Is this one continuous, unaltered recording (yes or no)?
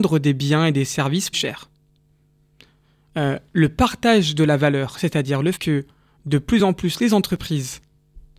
no